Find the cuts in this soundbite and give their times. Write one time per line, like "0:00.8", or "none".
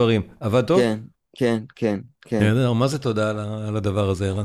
none